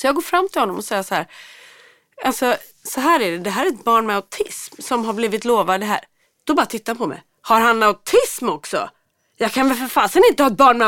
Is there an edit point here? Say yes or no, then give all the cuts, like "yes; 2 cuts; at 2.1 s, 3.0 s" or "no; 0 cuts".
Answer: no; 0 cuts